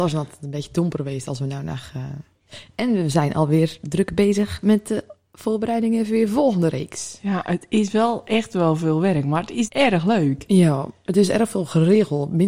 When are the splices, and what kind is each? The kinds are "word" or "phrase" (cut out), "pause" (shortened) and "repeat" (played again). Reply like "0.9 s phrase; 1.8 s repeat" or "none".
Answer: 9.7 s phrase